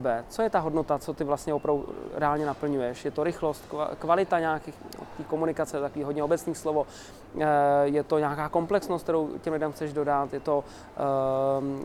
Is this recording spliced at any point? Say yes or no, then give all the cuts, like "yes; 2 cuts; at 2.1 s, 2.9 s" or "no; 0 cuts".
no; 0 cuts